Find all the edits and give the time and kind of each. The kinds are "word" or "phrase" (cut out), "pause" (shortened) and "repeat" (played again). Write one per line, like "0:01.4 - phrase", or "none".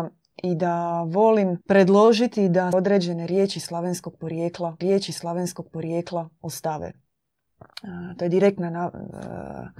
0:01.6 - pause
0:02.7 - word
0:04.8 - repeat